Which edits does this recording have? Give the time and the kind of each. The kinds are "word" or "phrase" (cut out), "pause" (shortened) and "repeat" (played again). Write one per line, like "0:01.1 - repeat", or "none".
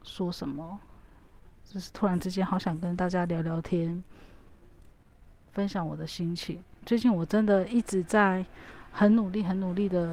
0:06.8 - pause